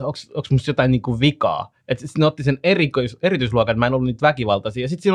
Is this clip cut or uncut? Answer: cut